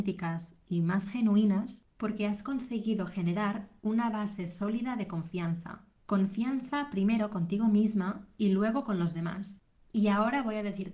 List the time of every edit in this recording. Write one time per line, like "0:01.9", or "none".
none